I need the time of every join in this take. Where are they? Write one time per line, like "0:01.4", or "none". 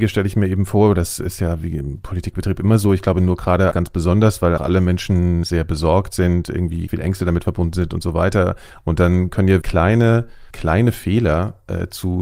0:03.7
0:04.6
0:05.4
0:06.9
0:09.6
0:10.5